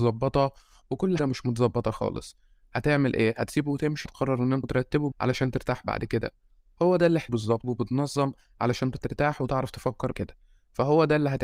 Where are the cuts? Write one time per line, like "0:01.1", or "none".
0:01.2
0:04.1
0:04.6
0:05.1
0:07.3
0:07.6
0:08.9
0:10.1